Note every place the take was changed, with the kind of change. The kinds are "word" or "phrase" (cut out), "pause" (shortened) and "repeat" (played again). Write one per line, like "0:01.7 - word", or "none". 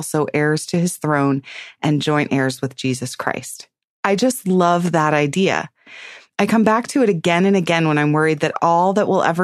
none